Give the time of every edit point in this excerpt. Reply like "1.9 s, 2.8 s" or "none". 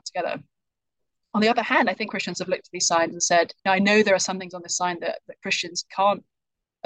2.1 s, 3.6 s